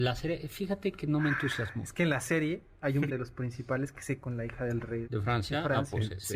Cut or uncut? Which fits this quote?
cut